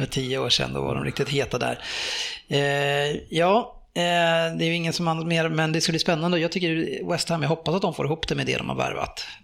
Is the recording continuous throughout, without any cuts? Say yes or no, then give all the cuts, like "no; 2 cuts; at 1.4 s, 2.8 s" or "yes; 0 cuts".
yes; 0 cuts